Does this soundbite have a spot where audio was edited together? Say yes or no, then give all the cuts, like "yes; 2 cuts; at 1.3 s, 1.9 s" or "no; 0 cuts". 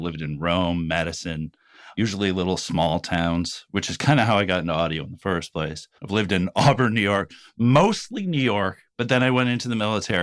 yes; 1 cut; at 6.0 s